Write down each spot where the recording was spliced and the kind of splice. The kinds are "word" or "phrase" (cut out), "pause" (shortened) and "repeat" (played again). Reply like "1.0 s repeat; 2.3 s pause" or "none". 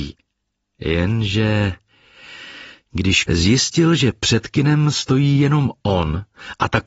3.2 s phrase